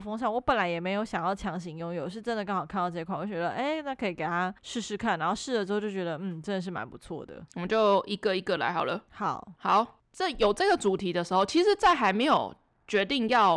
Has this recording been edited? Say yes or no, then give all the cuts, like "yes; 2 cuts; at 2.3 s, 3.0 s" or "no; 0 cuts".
yes; 1 cut; at 4.6 s